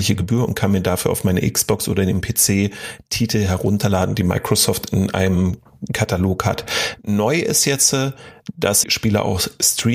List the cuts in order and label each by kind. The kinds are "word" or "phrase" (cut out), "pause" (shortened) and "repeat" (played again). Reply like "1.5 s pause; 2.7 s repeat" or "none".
8.8 s phrase